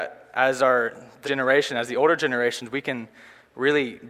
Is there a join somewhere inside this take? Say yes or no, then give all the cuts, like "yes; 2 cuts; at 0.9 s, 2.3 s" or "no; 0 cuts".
yes; 1 cut; at 1.2 s